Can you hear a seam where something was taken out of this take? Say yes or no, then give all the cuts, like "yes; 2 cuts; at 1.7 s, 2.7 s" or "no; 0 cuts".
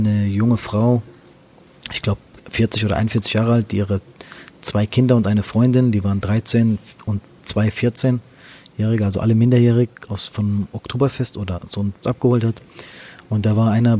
yes; 1 cut; at 12.0 s